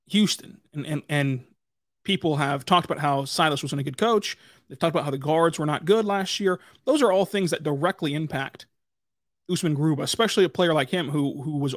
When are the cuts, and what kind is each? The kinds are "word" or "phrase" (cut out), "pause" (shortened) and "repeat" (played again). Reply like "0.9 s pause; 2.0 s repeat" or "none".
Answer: 1.7 s pause